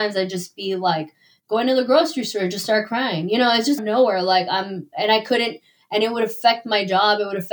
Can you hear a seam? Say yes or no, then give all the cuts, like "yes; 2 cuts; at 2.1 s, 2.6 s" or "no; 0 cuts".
yes; 1 cut; at 3.8 s